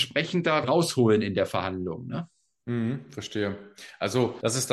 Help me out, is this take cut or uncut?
uncut